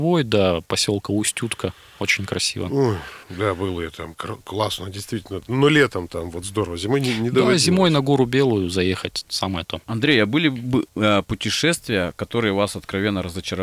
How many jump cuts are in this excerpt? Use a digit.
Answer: 2